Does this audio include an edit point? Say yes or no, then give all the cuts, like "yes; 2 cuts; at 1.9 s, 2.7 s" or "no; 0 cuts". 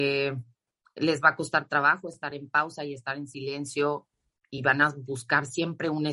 no; 0 cuts